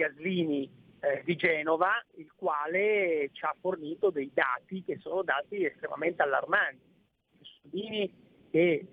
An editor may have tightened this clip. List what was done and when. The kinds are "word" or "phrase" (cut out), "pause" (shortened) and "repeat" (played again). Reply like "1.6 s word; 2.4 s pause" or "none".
2.0 s pause